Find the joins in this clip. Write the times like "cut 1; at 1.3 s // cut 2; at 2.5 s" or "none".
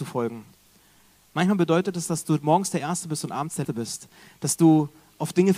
cut 1; at 3.6 s